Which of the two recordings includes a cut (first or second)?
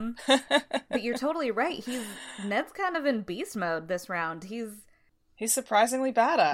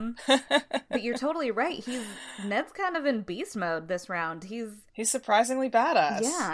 second